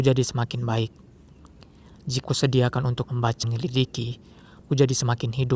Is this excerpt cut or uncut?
cut